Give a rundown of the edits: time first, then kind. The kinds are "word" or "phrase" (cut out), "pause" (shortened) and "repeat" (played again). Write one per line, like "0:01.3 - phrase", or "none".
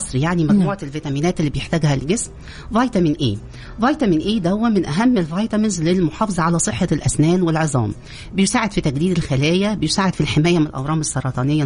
none